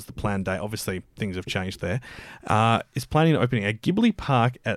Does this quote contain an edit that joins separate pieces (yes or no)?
no